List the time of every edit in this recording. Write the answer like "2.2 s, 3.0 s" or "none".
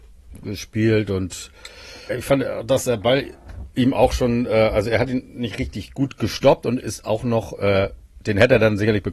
2.1 s

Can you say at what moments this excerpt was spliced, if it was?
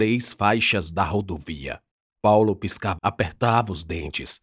1.9 s, 3.0 s

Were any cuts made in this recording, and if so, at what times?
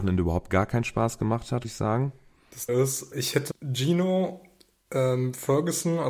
1.6 s, 2.7 s, 3.1 s, 3.5 s

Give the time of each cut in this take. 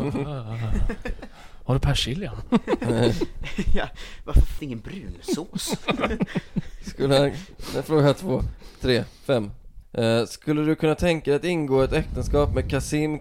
4.6 s, 8.8 s, 9.8 s

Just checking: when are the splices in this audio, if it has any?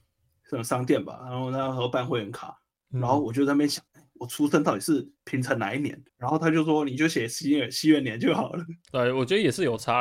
3.9 s, 5.2 s, 6.1 s

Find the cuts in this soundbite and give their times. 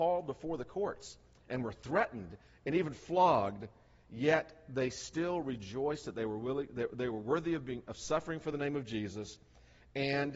none

